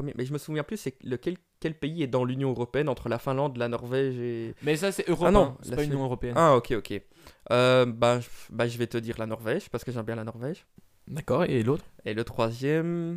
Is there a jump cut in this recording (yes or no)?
no